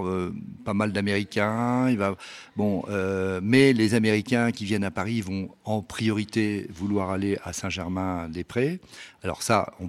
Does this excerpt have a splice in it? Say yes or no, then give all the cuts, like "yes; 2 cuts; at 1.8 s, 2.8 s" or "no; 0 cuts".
no; 0 cuts